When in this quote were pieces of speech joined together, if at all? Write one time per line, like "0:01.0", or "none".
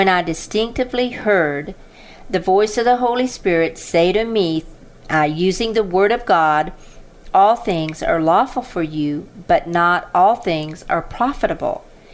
none